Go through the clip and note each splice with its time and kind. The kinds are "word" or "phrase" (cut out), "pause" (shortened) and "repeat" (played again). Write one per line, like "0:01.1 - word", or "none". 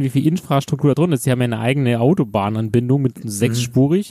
none